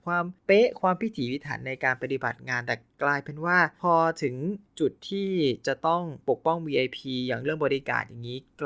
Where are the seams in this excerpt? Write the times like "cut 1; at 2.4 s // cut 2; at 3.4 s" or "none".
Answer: cut 1; at 4.7 s